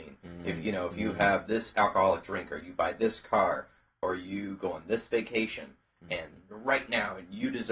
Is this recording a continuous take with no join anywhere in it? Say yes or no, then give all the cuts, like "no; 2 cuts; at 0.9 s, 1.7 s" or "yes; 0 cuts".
yes; 0 cuts